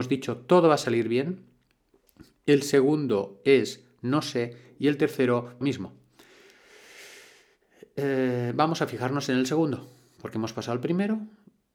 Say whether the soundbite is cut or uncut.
cut